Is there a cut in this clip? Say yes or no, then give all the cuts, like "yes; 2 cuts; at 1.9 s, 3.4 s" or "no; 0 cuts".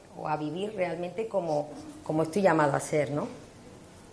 no; 0 cuts